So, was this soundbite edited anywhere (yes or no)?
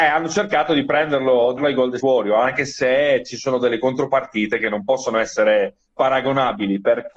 yes